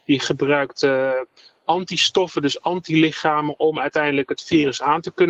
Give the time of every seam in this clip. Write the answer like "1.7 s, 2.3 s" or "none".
none